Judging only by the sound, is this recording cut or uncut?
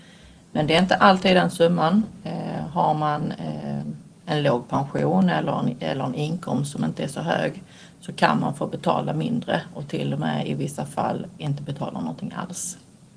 uncut